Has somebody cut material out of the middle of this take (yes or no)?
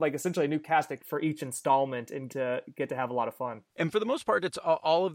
yes